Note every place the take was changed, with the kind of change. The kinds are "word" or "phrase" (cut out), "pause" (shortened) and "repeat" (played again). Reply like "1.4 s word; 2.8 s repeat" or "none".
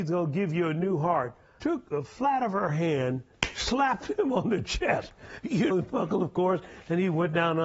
1.6 s word; 5.7 s word